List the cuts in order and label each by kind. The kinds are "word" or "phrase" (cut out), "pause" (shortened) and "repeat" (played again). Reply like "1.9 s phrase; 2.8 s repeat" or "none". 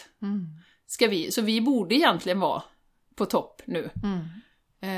none